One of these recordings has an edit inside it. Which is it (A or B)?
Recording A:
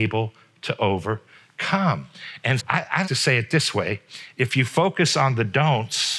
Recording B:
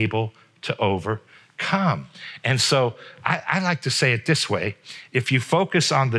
A